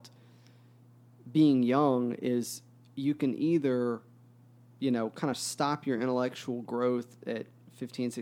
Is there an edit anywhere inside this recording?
no; 0 cuts

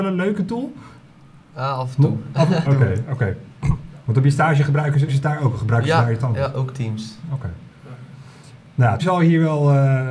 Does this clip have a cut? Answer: yes; 3 cuts; at 2.6 s, 5.1 s, 9.0 s

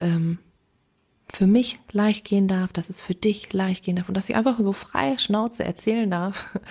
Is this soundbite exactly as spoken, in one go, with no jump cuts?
yes; 0 cuts

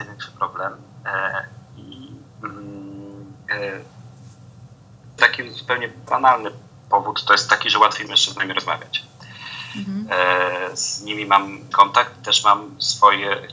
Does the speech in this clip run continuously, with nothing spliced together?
no; 4 cuts; at 5.2 s, 6.1 s, 8.1 s, 11.7 s

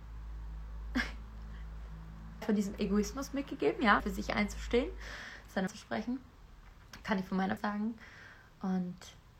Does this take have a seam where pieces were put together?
yes; 4 cuts; at 2.4 s, 4.0 s, 5.7 s, 7.6 s

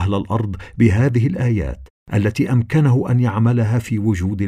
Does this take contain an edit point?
no; 0 cuts

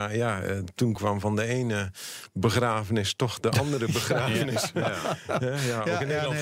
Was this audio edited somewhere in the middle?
no; 0 cuts

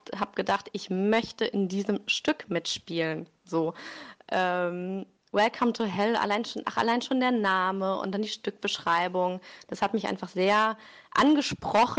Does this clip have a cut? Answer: no; 0 cuts

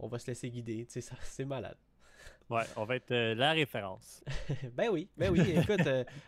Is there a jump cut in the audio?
yes; 1 cut; at 2.4 s

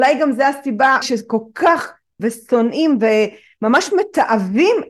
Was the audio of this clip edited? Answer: yes; 2 cuts; at 1.0 s, 2.2 s

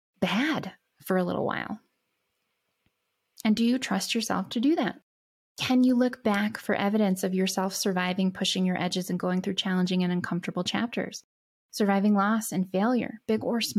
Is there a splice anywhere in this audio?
no; 0 cuts

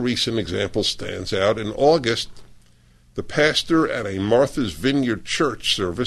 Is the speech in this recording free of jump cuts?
yes; 0 cuts

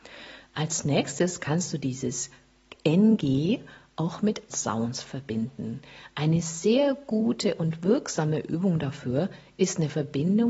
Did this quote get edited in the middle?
yes; 1 cut; at 4.5 s

